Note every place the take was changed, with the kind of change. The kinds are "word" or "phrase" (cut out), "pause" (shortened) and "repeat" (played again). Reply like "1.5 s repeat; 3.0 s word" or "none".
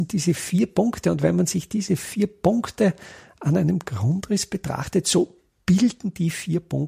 none